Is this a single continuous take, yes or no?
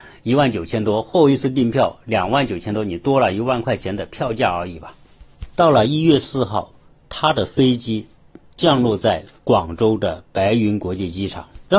yes